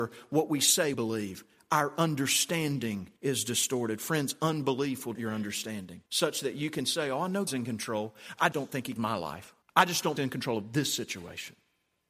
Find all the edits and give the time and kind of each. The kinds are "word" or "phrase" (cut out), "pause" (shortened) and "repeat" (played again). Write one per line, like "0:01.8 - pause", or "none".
0:00.9 - word
0:03.2 - pause
0:05.1 - word
0:06.1 - pause
0:07.5 - word
0:08.5 - word
0:09.0 - word
0:09.6 - pause
0:10.2 - phrase

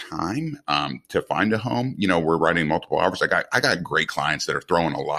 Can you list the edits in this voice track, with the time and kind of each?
none

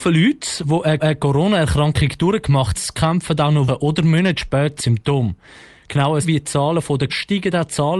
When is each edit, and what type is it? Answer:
0:01.0 - repeat
0:02.7 - word
0:03.7 - word
0:04.8 - word
0:06.2 - word
0:07.1 - word

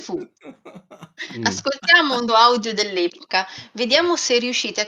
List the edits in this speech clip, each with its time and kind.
0:02.3 - word

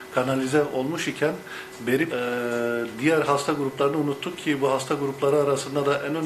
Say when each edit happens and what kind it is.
0:02.1 - word

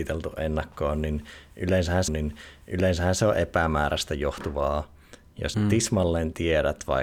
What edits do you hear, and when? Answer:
0:02.1 - repeat
0:05.5 - word

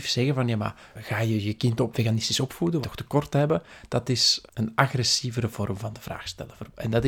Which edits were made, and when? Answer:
0:00.9 - word
0:01.9 - word
0:02.8 - phrase
0:04.5 - word

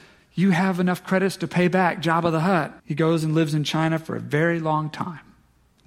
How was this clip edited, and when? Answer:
0:02.8 - pause

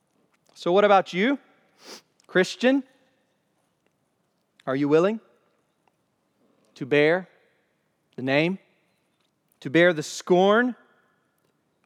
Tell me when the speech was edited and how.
0:09.3 - pause

